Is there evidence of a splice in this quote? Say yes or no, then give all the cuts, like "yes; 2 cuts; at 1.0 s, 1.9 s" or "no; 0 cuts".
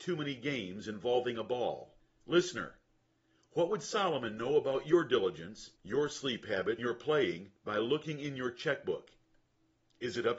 yes; 4 cuts; at 2.0 s, 5.8 s, 6.8 s, 7.6 s